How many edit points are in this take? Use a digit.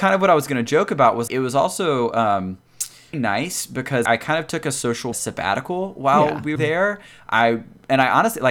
5